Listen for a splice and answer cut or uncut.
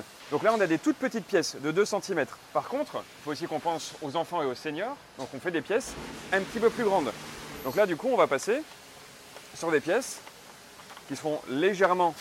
cut